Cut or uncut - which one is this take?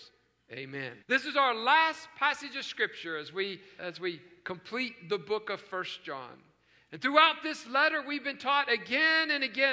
cut